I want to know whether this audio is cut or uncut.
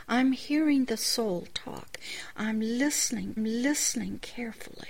cut